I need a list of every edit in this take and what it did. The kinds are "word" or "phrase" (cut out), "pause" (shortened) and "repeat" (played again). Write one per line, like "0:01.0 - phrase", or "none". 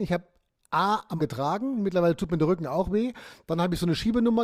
0:01.2 - word